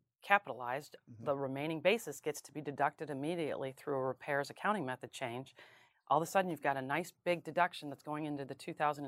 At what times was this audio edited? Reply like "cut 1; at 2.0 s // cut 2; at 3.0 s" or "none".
none